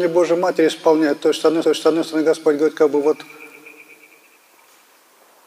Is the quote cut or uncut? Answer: cut